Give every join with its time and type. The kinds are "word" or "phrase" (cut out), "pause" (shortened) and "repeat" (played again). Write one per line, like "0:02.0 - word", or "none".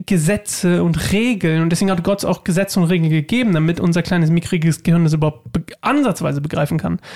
none